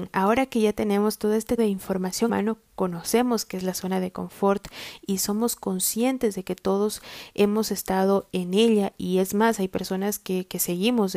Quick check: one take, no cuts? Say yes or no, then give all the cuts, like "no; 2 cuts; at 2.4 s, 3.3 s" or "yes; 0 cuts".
no; 2 cuts; at 1.6 s, 2.3 s